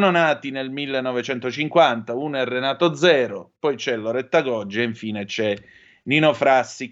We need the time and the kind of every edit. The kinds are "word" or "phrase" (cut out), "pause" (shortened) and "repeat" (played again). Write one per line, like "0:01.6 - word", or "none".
none